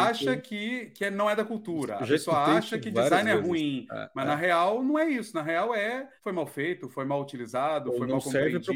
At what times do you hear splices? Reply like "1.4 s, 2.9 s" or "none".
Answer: 6.2 s